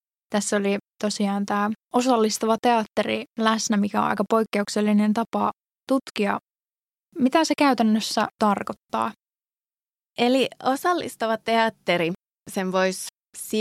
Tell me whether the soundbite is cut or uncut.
uncut